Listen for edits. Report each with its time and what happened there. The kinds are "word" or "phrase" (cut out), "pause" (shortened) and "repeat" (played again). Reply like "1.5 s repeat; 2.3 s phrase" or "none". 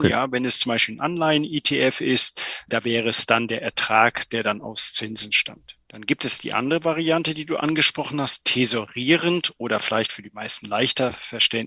5.8 s pause